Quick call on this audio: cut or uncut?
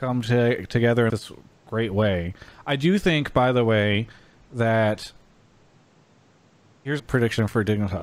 cut